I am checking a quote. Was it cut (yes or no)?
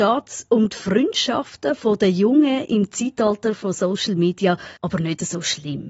yes